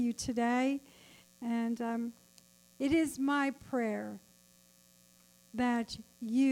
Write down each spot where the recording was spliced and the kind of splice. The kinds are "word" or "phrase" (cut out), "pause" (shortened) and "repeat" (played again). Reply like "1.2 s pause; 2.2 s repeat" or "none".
none